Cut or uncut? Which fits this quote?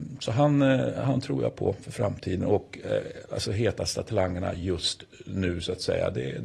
uncut